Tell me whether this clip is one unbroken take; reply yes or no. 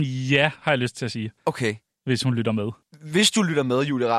no